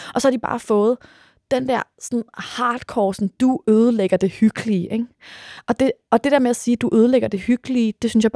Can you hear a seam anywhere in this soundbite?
no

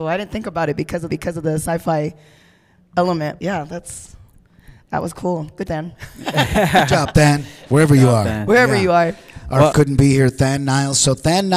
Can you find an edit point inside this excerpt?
yes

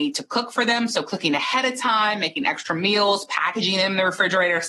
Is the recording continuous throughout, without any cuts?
yes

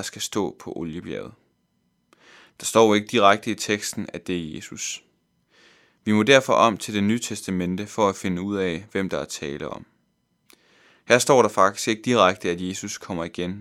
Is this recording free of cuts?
yes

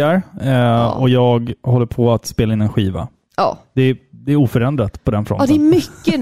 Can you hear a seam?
no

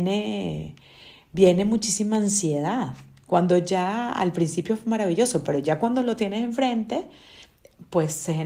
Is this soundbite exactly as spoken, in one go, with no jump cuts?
yes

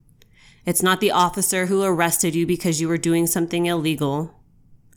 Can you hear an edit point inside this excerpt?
no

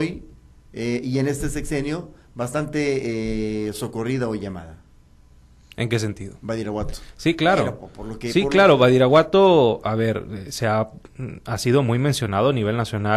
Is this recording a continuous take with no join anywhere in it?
yes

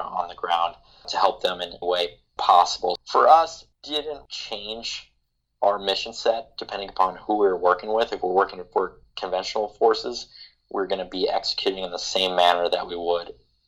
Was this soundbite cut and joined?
yes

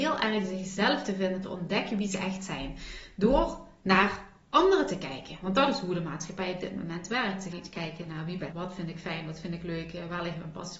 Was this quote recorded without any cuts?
no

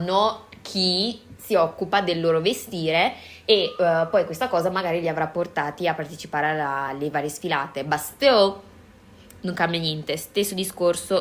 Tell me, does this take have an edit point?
no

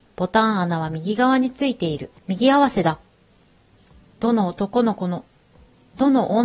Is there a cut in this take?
yes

